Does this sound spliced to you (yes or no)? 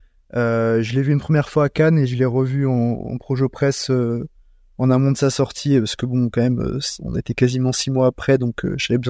no